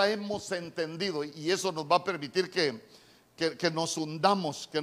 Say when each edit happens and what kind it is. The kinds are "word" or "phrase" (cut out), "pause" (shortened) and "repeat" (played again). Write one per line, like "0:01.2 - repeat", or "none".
none